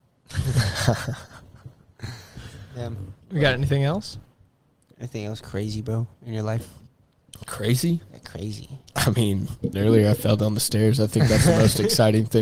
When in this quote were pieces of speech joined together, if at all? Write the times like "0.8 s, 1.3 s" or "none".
3.2 s, 4.7 s, 5.4 s, 8.9 s, 9.7 s